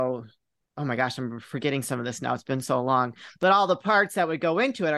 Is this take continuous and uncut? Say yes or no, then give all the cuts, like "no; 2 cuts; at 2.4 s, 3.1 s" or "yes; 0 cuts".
yes; 0 cuts